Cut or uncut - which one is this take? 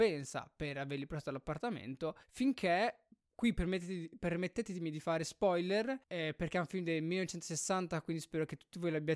cut